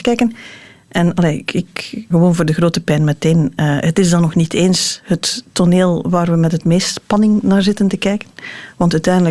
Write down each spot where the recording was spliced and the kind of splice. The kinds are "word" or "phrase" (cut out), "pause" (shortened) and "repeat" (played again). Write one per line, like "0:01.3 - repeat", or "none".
0:01.5 - word
0:02.1 - word